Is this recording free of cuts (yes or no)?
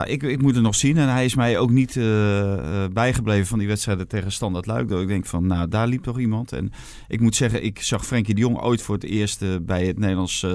yes